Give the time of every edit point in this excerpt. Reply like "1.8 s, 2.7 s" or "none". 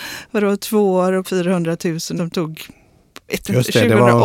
1.2 s, 2.2 s, 3.3 s